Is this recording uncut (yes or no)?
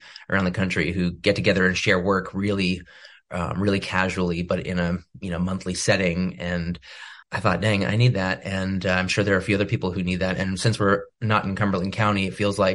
no